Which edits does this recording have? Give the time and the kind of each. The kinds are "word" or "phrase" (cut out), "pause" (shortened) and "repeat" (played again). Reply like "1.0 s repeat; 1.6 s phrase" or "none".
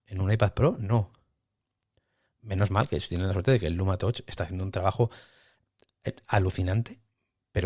none